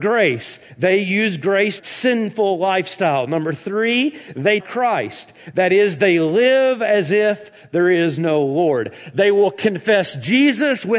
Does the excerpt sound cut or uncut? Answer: cut